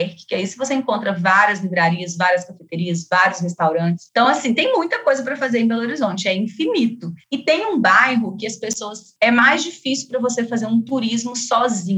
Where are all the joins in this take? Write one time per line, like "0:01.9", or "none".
none